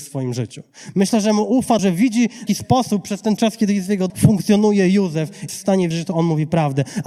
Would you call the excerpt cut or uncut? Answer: cut